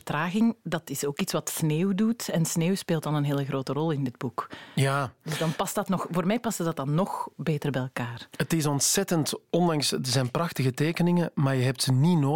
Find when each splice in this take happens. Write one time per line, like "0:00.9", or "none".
none